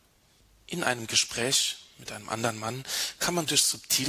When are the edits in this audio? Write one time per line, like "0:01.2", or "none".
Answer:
none